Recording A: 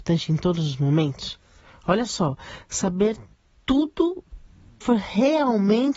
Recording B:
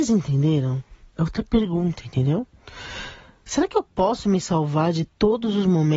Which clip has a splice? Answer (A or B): A